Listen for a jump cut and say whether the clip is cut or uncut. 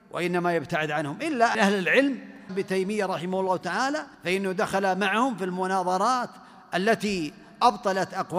cut